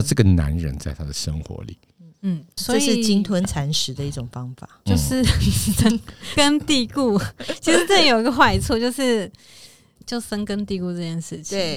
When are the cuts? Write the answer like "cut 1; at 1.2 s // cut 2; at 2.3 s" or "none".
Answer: cut 1; at 2.6 s // cut 2; at 6.4 s // cut 3; at 10.0 s